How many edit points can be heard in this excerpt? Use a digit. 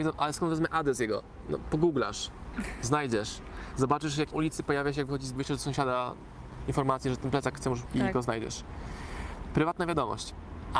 3